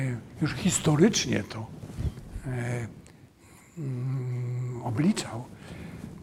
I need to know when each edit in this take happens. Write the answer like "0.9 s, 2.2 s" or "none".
none